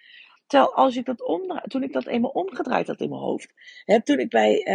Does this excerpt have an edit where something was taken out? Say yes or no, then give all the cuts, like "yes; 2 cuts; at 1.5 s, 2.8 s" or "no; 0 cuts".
no; 0 cuts